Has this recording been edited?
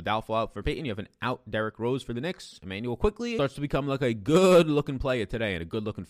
no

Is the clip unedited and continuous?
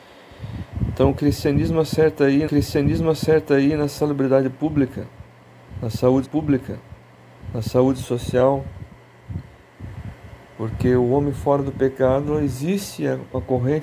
no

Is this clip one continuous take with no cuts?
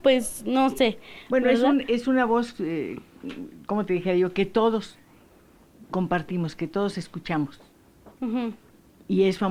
no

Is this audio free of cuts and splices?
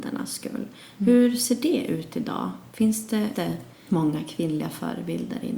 no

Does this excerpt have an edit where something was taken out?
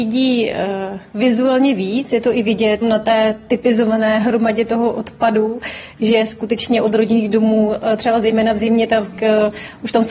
yes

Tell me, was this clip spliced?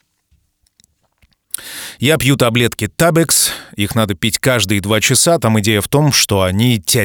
no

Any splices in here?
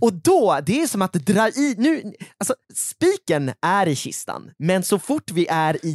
yes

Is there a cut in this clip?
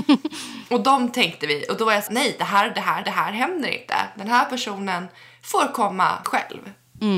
yes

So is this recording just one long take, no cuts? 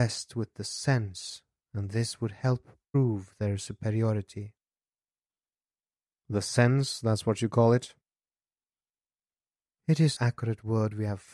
no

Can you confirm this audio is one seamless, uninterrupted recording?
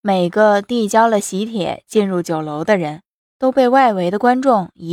yes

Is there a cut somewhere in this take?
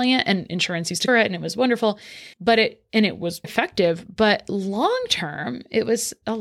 yes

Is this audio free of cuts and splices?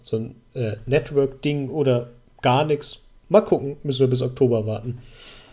yes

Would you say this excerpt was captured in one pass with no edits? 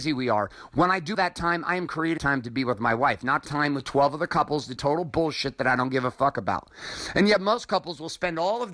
no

